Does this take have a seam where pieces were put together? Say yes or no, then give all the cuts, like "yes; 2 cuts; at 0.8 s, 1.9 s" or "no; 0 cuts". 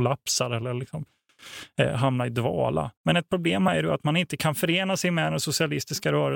yes; 1 cut; at 3.0 s